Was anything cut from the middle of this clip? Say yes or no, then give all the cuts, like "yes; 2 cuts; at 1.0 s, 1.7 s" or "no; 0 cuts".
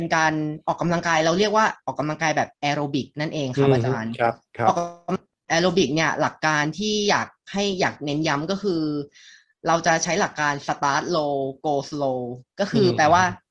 no; 0 cuts